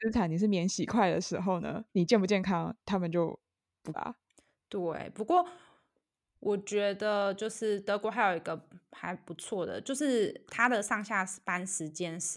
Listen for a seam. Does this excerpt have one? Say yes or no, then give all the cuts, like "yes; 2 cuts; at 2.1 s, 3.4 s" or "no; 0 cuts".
yes; 3 cuts; at 1.9 s, 2.8 s, 3.9 s